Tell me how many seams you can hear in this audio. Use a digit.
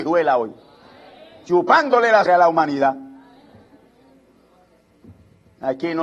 1